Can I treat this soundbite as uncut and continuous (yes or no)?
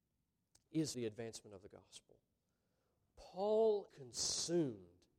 no